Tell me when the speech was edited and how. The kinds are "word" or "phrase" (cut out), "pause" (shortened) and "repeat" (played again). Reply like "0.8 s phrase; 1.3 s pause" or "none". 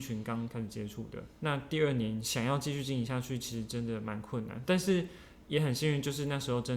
1.3 s pause